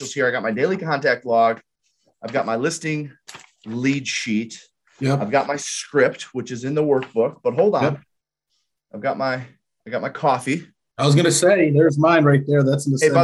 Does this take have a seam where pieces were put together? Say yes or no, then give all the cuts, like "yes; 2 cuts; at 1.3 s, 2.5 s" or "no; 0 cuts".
no; 0 cuts